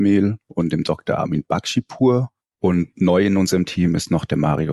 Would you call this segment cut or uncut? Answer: uncut